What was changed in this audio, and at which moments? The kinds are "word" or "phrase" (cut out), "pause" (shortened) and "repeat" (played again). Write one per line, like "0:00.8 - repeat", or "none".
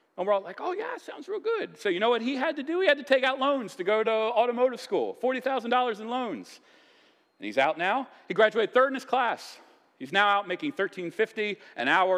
none